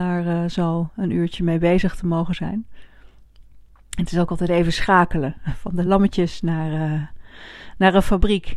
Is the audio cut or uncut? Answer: uncut